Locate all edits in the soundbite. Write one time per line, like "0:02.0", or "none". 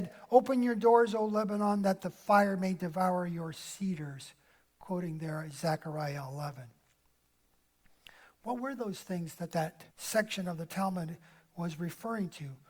0:09.9